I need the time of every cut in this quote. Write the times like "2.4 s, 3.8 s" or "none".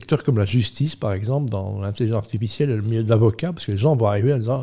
none